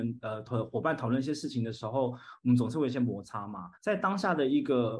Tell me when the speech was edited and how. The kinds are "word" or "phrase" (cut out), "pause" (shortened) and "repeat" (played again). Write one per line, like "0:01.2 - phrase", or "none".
0:03.8 - pause